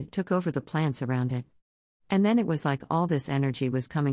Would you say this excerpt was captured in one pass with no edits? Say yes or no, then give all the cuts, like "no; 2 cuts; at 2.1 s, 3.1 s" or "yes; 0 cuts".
yes; 0 cuts